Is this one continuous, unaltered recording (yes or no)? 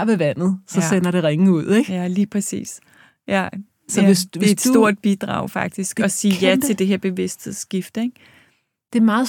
yes